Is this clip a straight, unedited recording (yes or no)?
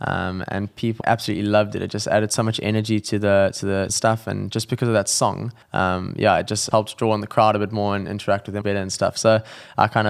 no